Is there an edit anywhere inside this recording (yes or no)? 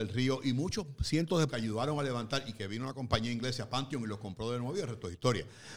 yes